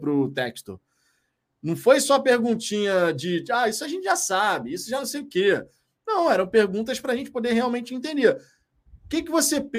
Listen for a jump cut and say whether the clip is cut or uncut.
uncut